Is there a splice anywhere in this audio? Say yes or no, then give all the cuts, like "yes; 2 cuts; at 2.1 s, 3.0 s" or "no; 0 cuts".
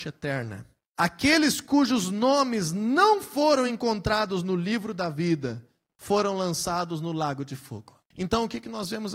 no; 0 cuts